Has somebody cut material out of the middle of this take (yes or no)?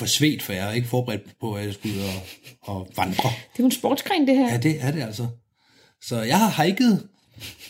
no